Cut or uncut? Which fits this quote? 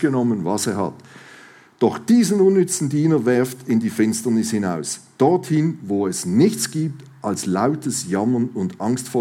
uncut